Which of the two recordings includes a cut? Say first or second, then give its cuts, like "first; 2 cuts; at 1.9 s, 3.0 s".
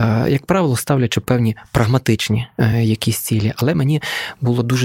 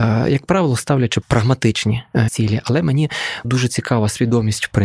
second; 3 cuts; at 1.2 s, 2.3 s, 3.4 s